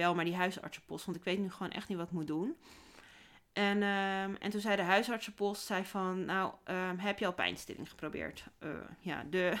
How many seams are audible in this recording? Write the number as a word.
zero